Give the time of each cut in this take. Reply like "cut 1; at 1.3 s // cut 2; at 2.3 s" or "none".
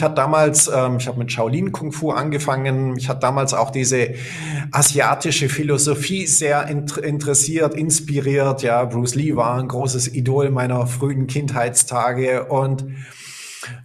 none